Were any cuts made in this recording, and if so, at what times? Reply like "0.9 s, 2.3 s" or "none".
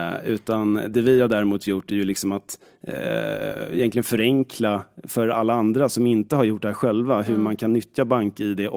none